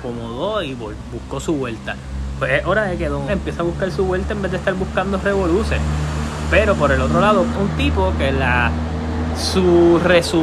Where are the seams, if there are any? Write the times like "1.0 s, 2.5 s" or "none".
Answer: 3.3 s, 7.5 s